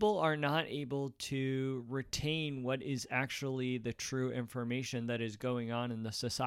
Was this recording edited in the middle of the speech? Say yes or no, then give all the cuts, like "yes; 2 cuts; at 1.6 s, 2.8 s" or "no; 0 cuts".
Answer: no; 0 cuts